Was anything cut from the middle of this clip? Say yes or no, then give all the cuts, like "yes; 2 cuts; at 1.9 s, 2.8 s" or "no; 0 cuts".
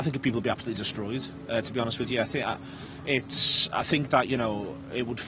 no; 0 cuts